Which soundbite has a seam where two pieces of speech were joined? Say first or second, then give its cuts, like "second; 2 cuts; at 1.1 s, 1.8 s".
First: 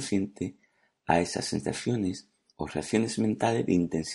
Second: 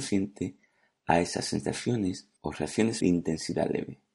second; 2 cuts; at 2.4 s, 3.0 s